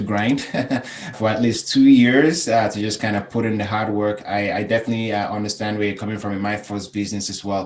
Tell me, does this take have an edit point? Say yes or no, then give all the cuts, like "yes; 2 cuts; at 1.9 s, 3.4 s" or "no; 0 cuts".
yes; 1 cut; at 1.1 s